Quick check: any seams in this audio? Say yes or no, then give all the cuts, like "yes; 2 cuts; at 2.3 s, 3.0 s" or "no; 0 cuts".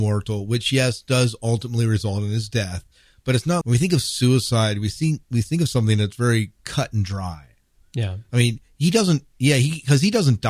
yes; 1 cut; at 3.6 s